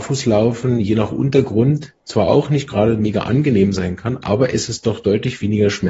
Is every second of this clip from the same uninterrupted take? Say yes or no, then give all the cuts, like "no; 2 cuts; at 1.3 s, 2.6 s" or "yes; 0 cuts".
no; 1 cut; at 2.0 s